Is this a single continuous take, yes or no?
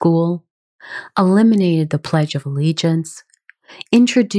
yes